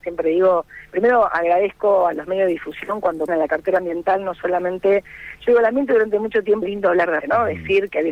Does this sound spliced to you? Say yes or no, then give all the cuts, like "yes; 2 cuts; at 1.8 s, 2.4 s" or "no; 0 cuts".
yes; 3 cuts; at 3.3 s, 6.6 s, 7.2 s